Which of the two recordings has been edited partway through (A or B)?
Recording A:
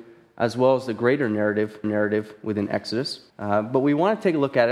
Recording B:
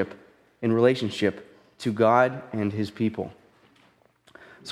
A